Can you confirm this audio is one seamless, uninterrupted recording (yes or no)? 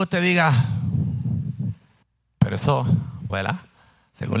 no